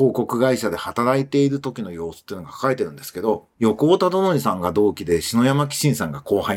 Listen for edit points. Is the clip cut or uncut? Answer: cut